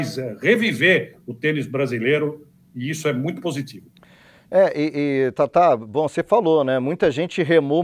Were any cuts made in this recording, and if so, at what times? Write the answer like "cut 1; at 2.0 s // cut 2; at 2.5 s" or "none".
none